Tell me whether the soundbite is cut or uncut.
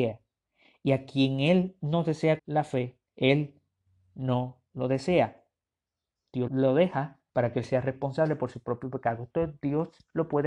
cut